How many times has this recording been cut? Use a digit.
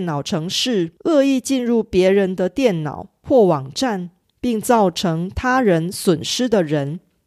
2